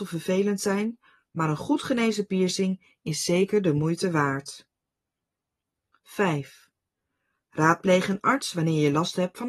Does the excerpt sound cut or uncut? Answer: uncut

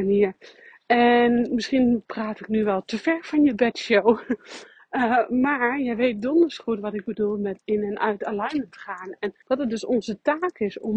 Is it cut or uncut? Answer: cut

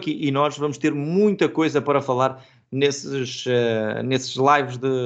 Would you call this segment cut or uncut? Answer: uncut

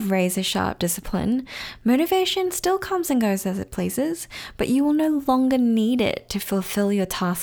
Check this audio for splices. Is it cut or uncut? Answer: uncut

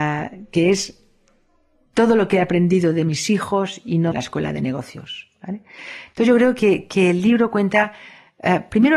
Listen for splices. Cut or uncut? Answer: cut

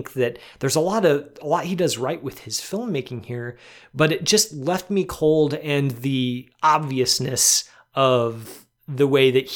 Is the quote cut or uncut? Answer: uncut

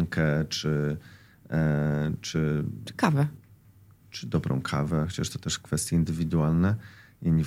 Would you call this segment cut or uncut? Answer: uncut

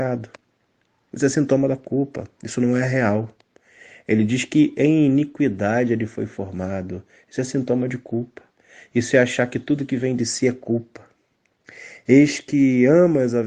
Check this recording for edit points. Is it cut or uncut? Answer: uncut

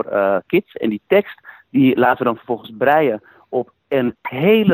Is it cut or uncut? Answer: uncut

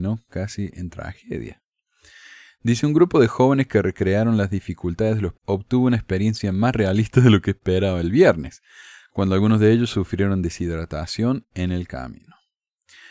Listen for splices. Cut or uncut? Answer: cut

